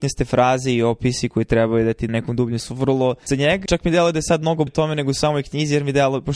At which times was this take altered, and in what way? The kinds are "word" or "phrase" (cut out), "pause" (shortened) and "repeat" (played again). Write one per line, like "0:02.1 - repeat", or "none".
0:02.1 - word
0:02.6 - word
0:03.3 - word
0:03.7 - word
0:04.7 - word